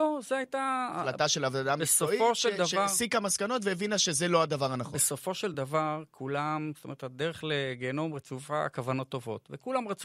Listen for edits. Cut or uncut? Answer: uncut